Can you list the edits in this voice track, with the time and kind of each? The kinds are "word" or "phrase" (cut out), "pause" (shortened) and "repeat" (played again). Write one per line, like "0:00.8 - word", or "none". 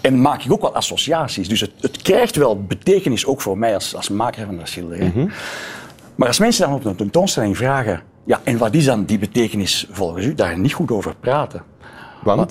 0:10.4 - phrase